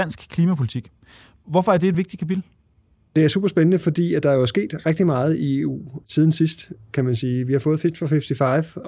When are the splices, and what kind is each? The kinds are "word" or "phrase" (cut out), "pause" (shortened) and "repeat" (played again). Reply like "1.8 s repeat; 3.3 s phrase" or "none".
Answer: none